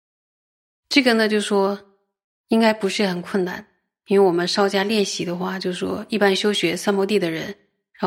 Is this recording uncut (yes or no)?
yes